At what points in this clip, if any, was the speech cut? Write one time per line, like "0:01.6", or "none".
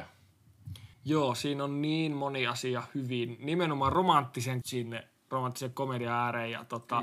0:00.9
0:04.6